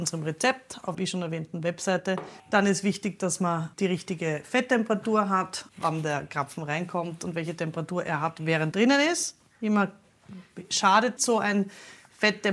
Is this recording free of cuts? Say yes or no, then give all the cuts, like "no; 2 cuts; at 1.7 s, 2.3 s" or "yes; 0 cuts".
no; 6 cuts; at 0.9 s, 2.4 s, 3.7 s, 5.7 s, 8.7 s, 11.2 s